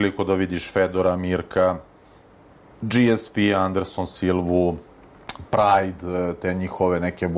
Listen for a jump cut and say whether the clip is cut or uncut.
uncut